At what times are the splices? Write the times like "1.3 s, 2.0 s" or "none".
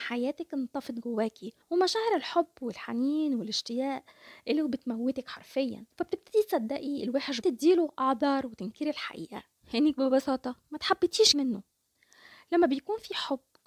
1.6 s, 5.9 s, 7.4 s, 9.5 s, 10.6 s, 11.3 s